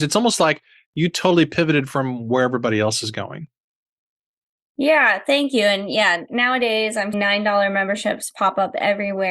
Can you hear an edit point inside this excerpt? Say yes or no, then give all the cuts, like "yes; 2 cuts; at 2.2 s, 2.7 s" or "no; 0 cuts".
yes; 2 cuts; at 6.3 s, 7.1 s